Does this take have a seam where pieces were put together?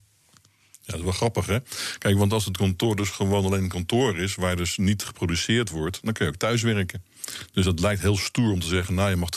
no; 0 cuts

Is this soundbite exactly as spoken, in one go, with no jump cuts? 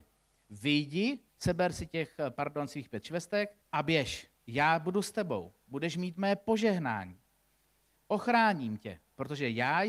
no; 3 cuts; at 1.3 s, 3.6 s, 4.4 s

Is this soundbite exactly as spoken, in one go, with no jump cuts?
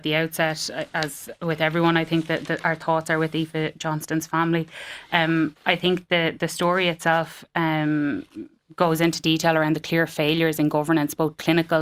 yes; 0 cuts

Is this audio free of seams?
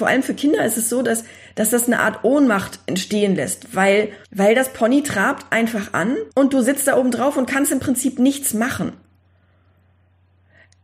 no; 2 cuts; at 4.2 s, 6.3 s

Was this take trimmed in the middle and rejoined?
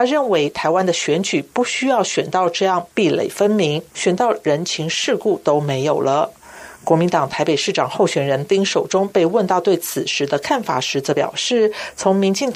yes; 1 cut; at 3.9 s

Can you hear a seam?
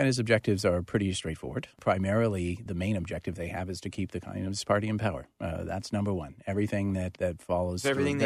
yes; 1 cut; at 2.7 s

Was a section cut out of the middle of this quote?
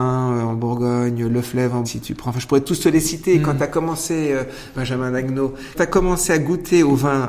yes; 3 cuts; at 1.8 s, 4.7 s, 5.7 s

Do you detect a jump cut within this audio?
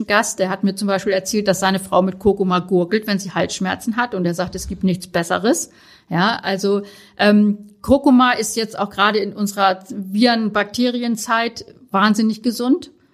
no; 0 cuts

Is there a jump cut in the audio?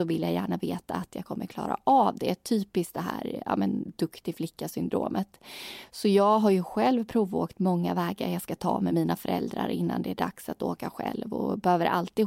no; 0 cuts

